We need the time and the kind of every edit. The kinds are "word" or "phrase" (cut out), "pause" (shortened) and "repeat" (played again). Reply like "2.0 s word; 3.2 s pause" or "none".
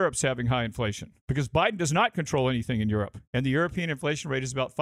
1.2 s pause; 3.2 s pause

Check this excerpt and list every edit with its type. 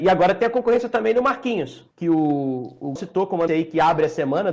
1.9 s pause; 3.0 s word; 3.5 s word

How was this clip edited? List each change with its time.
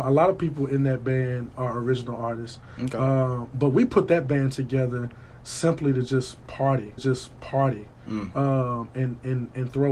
7.0 s repeat

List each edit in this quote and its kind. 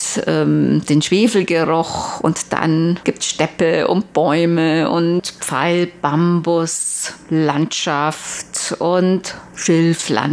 3.0 s word

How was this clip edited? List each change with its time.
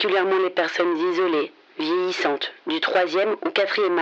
none

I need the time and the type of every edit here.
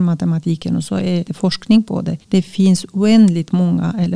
1.3 s word; 2.2 s pause

